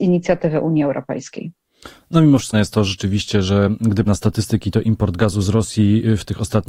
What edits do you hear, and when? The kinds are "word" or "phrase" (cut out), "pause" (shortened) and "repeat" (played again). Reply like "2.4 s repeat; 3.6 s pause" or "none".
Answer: 2.5 s word; 4.1 s word